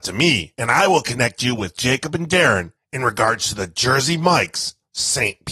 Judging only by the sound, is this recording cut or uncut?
uncut